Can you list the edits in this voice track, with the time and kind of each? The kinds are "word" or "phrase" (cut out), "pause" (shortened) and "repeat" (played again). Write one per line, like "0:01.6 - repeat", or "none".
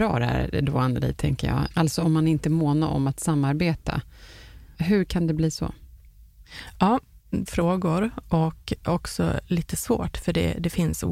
0:07.5 - phrase